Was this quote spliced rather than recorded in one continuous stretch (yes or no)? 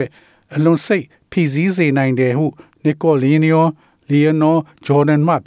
no